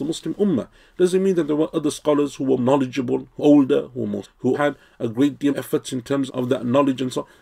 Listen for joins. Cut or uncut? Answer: cut